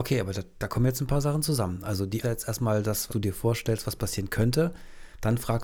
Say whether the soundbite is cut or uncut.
cut